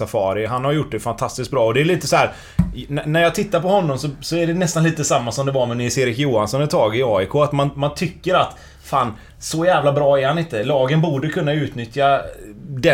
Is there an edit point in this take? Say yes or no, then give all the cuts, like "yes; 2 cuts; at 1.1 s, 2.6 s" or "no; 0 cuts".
no; 0 cuts